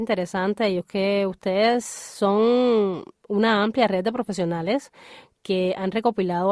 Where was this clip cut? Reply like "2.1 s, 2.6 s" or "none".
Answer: none